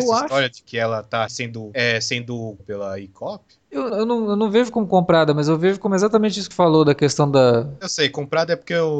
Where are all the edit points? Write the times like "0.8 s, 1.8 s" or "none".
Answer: 1.3 s, 2.6 s, 3.9 s, 6.5 s